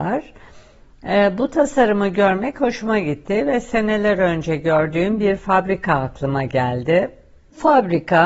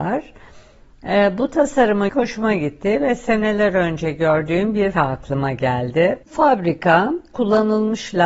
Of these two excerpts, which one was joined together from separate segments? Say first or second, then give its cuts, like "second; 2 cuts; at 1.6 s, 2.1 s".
second; 3 cuts; at 2.1 s, 4.9 s, 6.2 s